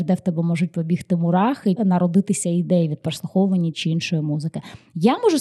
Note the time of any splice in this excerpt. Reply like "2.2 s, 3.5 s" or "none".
1.8 s, 3.7 s